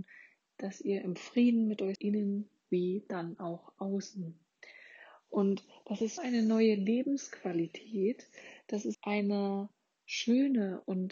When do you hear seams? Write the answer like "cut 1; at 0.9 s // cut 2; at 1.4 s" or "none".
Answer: cut 1; at 2.0 s // cut 2; at 6.2 s // cut 3; at 8.9 s